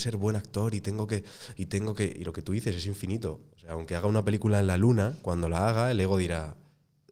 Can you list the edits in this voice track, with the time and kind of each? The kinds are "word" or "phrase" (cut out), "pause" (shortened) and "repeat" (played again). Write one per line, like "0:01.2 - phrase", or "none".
none